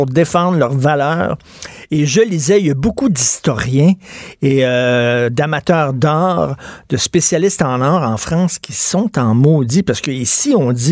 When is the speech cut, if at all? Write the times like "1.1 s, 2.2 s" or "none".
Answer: none